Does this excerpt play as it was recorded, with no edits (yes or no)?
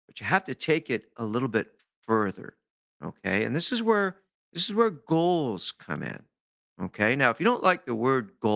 yes